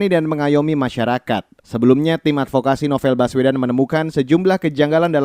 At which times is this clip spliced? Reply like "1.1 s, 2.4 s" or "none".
1.6 s